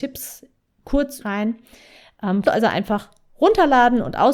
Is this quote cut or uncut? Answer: cut